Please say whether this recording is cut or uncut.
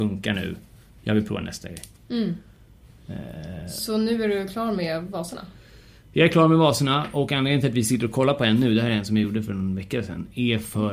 uncut